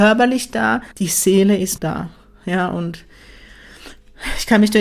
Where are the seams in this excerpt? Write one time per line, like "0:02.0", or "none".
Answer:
0:00.9
0:01.8